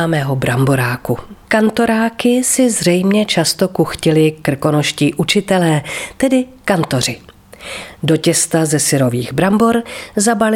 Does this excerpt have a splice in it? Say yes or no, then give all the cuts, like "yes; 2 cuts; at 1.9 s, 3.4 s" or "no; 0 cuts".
yes; 1 cut; at 1.4 s